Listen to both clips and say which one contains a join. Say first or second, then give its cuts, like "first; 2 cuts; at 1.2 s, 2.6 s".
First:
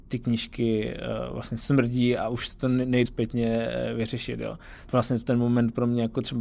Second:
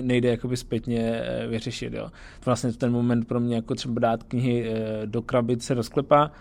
first; 1 cut; at 3.1 s